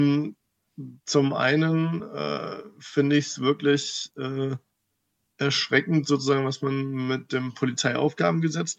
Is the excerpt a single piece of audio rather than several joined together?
yes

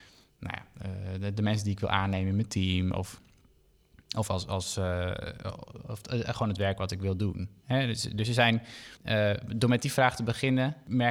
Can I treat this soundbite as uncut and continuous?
no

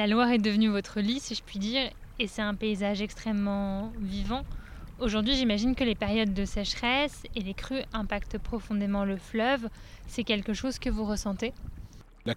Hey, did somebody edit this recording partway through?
no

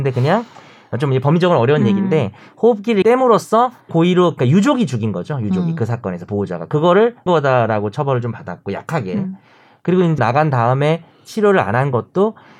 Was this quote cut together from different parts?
yes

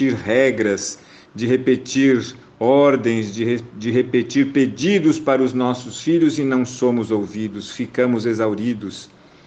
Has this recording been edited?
no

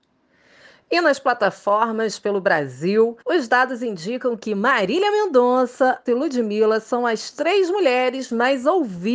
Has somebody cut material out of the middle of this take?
yes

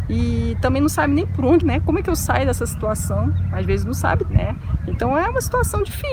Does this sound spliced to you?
yes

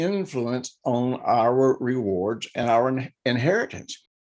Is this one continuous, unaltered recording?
yes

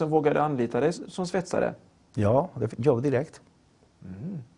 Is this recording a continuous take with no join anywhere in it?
no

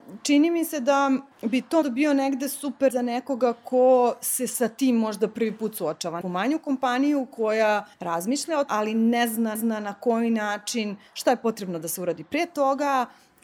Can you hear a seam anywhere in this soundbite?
yes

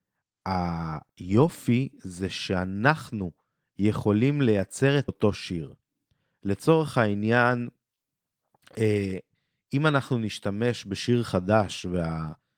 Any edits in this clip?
yes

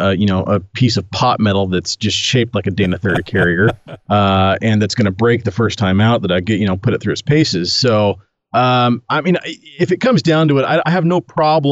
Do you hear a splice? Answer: no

